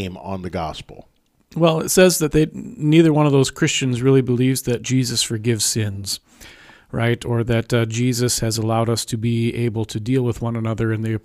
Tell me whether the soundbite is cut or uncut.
uncut